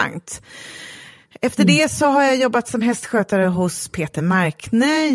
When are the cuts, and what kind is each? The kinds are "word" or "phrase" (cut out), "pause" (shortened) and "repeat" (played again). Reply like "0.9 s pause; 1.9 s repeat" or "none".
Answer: none